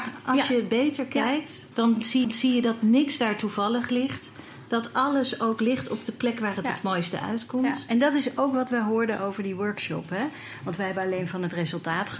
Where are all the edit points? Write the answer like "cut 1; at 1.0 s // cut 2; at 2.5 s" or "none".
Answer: cut 1; at 1.7 s // cut 2; at 2.2 s